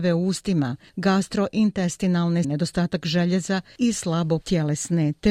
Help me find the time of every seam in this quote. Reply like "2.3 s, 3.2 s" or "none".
2.4 s, 4.4 s

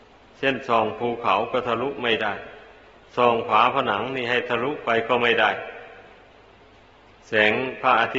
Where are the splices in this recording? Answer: none

